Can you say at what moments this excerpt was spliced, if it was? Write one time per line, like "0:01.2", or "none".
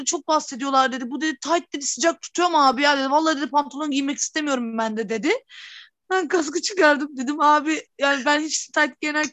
none